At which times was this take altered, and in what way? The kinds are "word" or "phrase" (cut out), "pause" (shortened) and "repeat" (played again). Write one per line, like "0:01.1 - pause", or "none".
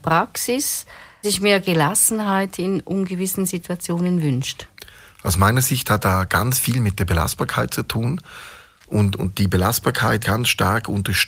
0:01.2 - word
0:06.0 - word
0:09.2 - word
0:10.2 - word

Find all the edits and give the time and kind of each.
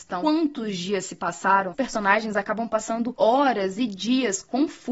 0:01.7 - word

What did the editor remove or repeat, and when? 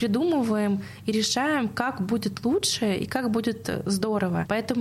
none

